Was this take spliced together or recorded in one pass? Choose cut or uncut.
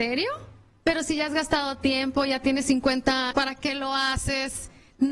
cut